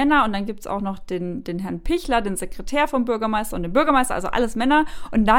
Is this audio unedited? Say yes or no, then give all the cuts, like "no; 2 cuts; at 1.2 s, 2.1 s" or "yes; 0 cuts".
yes; 0 cuts